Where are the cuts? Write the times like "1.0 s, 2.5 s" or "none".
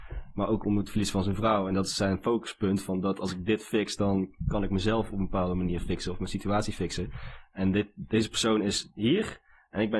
none